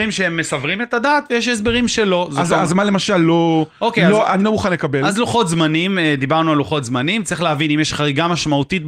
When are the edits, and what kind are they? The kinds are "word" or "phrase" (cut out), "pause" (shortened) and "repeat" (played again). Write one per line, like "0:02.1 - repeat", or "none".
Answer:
none